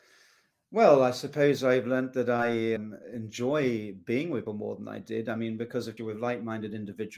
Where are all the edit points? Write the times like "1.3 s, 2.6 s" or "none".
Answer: 2.8 s, 4.5 s, 6.0 s